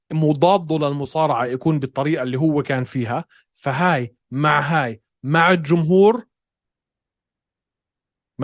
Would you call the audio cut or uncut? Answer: uncut